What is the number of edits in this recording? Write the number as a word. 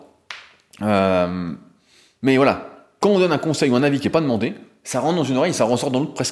zero